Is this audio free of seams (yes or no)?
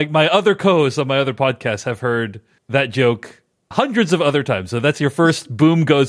no